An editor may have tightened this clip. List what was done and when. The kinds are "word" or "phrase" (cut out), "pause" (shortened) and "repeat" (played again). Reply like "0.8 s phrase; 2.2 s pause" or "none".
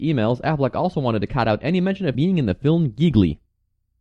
2.1 s word